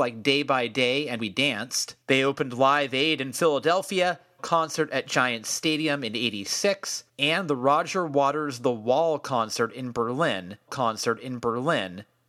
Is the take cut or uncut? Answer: cut